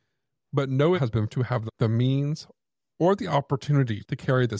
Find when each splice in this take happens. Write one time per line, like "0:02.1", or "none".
0:00.9
0:01.3
0:01.7